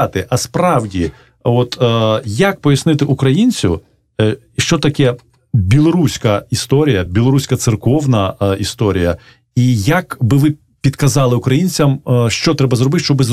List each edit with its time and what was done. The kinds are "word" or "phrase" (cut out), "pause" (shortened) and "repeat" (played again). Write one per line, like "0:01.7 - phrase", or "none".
none